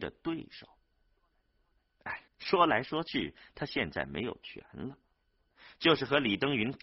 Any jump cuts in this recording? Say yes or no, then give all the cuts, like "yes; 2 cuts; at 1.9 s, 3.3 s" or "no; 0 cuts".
yes; 1 cut; at 2.3 s